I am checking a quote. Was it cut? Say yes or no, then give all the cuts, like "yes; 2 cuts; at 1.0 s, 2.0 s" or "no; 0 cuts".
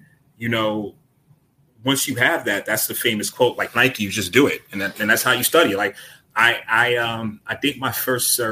no; 0 cuts